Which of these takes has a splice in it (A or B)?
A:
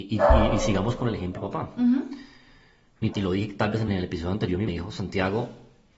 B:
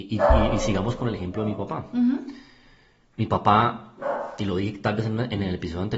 A